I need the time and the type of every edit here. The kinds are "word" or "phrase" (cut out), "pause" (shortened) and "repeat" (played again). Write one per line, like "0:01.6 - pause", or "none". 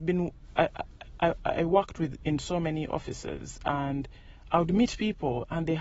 none